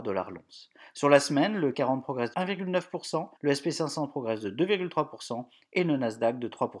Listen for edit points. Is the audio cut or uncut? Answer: cut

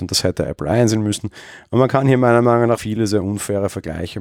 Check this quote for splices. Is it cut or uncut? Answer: cut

